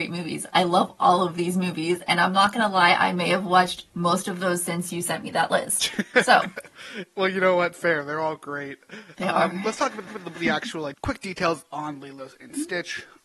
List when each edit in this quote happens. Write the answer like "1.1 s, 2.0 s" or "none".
9.1 s, 10.1 s, 10.9 s